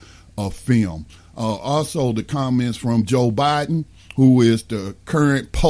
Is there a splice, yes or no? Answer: no